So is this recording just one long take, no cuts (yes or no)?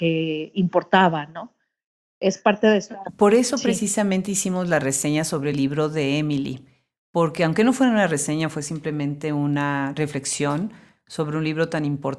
yes